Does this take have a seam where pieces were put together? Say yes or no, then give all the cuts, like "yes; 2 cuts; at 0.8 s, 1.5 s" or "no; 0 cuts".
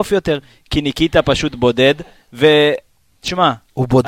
no; 0 cuts